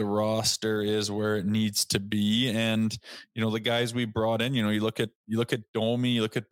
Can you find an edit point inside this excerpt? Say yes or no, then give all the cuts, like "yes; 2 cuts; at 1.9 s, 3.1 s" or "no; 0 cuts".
no; 0 cuts